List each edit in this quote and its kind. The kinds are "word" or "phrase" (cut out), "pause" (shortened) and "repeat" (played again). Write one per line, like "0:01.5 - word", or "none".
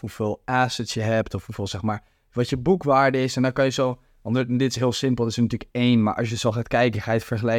none